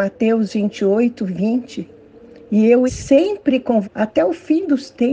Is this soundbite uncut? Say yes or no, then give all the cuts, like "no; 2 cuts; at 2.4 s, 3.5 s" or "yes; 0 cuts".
no; 2 cuts; at 2.9 s, 3.8 s